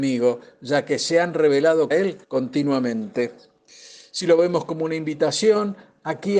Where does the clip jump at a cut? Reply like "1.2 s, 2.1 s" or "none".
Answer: 1.9 s, 2.2 s

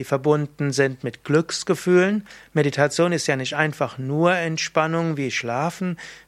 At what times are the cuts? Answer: none

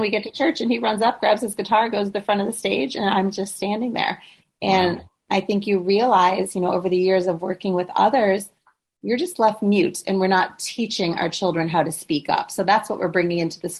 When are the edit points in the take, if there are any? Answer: none

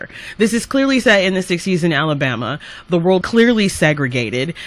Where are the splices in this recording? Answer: 3.2 s

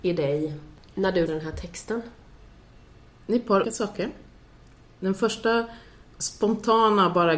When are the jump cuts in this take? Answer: 1.3 s, 3.6 s

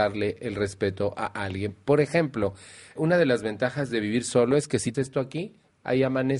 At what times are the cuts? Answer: 3.0 s, 4.9 s

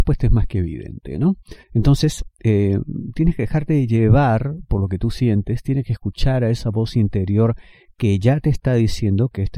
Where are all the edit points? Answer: 1.6 s

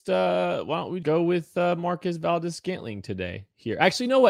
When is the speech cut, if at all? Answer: 1.0 s

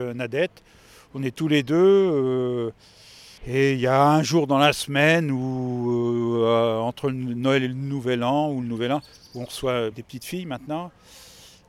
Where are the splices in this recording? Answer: 3.4 s, 9.9 s

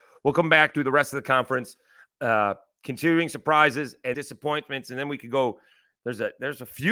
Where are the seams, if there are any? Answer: 4.1 s

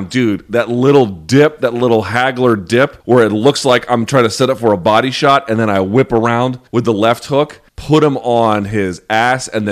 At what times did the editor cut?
3.0 s, 6.7 s, 7.7 s

